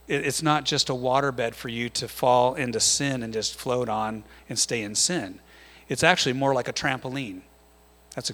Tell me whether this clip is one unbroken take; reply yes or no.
yes